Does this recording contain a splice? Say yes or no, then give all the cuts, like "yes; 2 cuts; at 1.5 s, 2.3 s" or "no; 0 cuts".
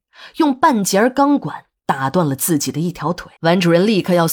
yes; 1 cut; at 3.4 s